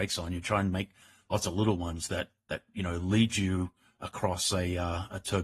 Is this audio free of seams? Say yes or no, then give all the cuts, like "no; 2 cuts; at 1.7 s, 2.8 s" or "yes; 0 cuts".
yes; 0 cuts